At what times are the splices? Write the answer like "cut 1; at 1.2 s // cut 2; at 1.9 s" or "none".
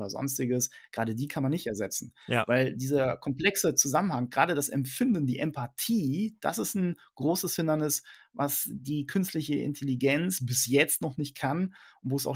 none